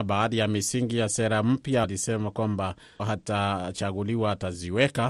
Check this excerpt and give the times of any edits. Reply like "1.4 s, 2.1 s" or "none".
1.8 s, 3.0 s